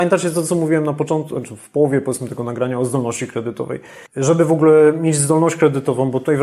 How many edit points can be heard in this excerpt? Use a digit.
1